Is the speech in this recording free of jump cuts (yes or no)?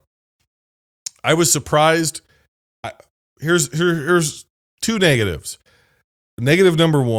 yes